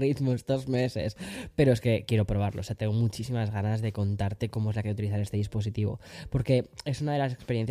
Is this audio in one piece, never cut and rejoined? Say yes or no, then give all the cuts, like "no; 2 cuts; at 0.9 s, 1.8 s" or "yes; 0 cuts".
no; 1 cut; at 4.8 s